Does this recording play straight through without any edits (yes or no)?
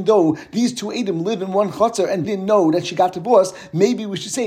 no